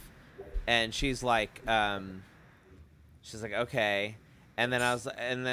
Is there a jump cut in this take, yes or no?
no